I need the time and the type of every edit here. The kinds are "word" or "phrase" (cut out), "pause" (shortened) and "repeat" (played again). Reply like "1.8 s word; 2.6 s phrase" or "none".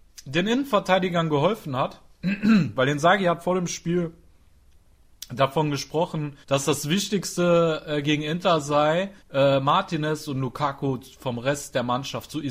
6.4 s pause; 9.2 s pause